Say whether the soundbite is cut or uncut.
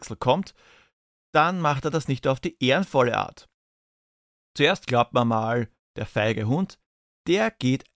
uncut